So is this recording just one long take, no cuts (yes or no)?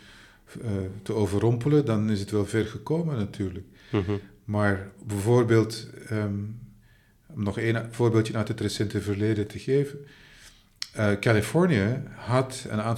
yes